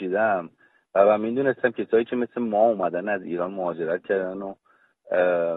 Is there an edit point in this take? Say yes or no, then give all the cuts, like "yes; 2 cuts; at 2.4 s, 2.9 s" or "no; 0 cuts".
no; 0 cuts